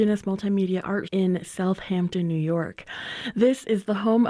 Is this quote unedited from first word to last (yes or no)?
no